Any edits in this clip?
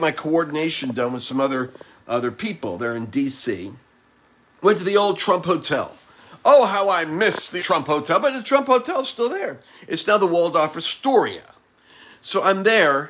yes; 1 cut; at 7.6 s

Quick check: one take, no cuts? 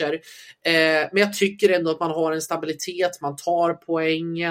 yes; 0 cuts

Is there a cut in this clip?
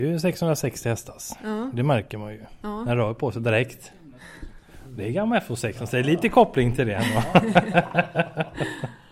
no; 0 cuts

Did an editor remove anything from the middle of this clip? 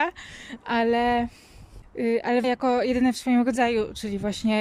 yes; 1 cut; at 2.4 s

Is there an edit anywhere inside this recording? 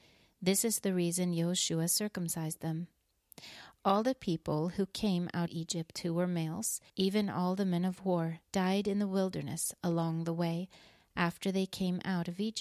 yes; 3 cuts; at 5.5 s, 6.9 s, 8.4 s

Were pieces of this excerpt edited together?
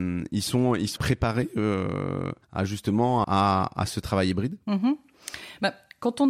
yes; 3 cuts; at 1.0 s, 2.4 s, 3.2 s

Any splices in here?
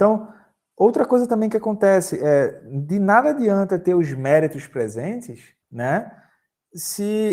yes; 1 cut; at 5.6 s

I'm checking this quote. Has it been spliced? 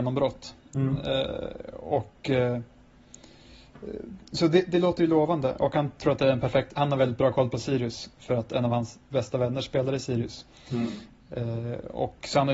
no; 0 cuts

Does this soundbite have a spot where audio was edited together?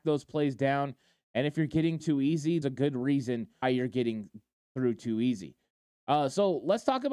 yes; 3 cuts; at 2.0 s, 2.6 s, 3.6 s

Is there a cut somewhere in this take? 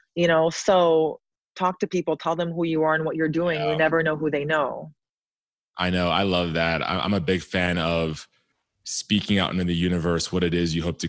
no; 0 cuts

